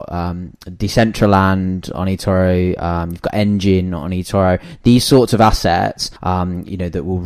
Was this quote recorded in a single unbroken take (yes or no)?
no